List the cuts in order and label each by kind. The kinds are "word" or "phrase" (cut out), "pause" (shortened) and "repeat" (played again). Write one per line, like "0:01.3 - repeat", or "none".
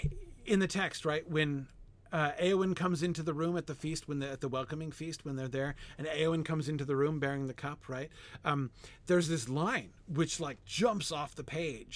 none